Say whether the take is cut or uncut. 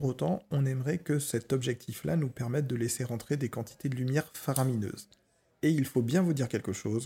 uncut